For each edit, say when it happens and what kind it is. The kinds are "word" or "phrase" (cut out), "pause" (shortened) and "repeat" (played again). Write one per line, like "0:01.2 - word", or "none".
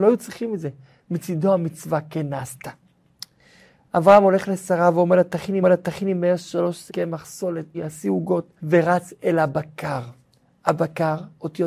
0:05.6 - repeat
0:06.9 - word
0:07.7 - word
0:08.6 - pause